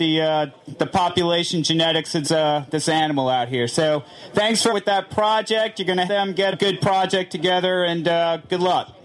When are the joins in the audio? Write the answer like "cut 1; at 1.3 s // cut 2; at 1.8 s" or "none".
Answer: cut 1; at 2.2 s // cut 2; at 4.7 s // cut 3; at 6.1 s // cut 4; at 6.5 s